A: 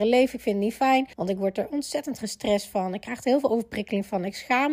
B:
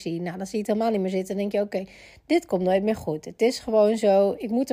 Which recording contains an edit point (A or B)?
A